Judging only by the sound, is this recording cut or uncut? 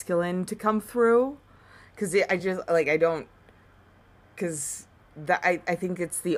uncut